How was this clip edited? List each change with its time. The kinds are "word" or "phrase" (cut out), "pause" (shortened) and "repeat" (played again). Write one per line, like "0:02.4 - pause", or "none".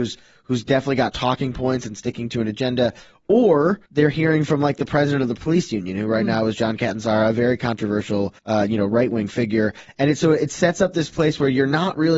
0:03.8 - pause
0:08.4 - pause